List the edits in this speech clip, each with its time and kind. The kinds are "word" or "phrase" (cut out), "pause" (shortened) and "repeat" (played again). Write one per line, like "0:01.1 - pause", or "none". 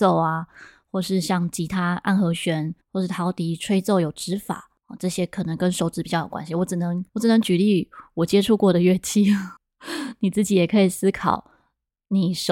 0:02.8 - pause
0:04.8 - pause
0:07.1 - pause
0:09.6 - pause